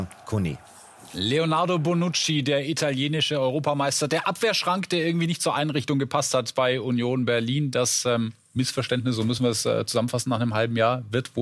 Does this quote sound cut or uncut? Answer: uncut